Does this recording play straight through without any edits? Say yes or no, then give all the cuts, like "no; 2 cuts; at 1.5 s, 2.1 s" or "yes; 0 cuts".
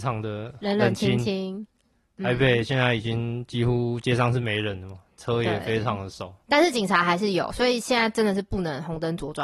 yes; 0 cuts